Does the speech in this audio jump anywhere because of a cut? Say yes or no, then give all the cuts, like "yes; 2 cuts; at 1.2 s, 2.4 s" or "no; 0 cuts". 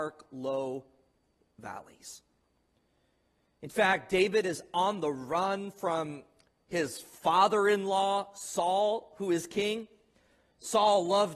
no; 0 cuts